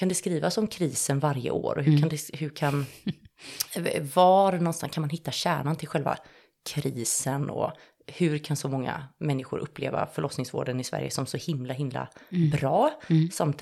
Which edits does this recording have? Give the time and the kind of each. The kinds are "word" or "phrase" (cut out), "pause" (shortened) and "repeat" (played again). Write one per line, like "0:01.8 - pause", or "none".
none